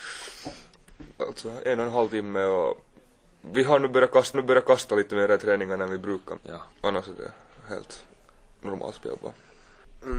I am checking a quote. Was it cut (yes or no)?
yes